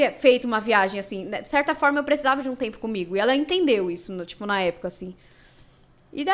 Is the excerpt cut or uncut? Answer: uncut